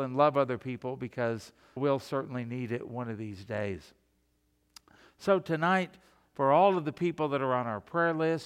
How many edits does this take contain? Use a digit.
1